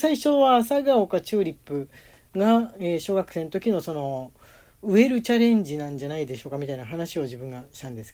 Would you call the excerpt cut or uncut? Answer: uncut